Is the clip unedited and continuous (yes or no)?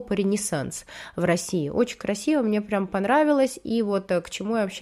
yes